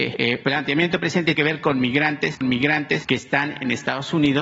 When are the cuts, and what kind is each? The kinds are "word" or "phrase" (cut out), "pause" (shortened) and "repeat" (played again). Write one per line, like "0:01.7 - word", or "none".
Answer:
0:01.3 - word
0:02.4 - repeat